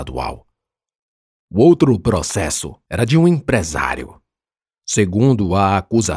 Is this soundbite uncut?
no; 1 cut; at 2.8 s

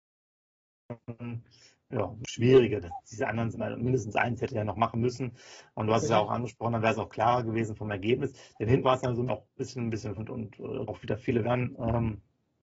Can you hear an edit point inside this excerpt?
yes; 6 cuts; at 3.5 s, 8.8 s, 9.3 s, 10.2 s, 10.9 s, 11.4 s

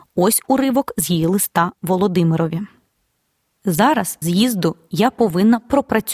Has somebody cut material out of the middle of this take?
yes; 1 cut; at 4.2 s

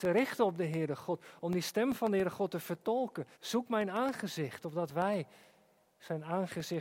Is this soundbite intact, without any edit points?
no; 1 cut; at 3.3 s

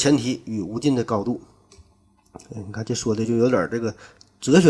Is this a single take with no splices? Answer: yes; 0 cuts

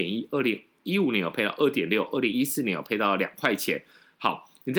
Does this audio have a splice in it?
no; 0 cuts

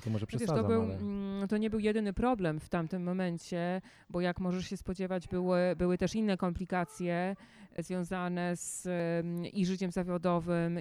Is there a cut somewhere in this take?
no; 0 cuts

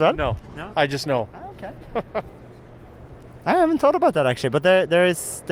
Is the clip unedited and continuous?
yes; 0 cuts

